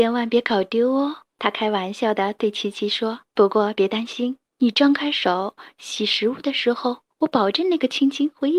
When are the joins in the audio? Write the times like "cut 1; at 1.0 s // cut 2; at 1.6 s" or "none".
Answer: cut 1; at 1.3 s // cut 2; at 3.3 s // cut 3; at 4.5 s // cut 4; at 7.1 s